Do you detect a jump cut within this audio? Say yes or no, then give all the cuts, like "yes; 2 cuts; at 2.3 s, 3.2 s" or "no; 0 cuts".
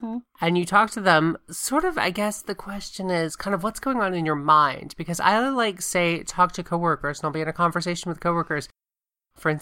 no; 0 cuts